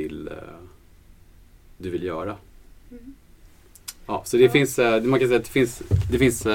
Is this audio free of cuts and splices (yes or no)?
yes